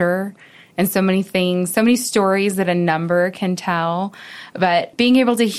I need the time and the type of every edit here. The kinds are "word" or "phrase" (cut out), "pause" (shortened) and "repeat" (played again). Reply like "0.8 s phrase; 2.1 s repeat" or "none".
none